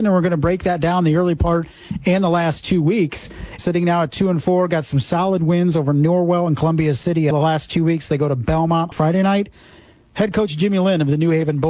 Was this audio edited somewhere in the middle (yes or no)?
yes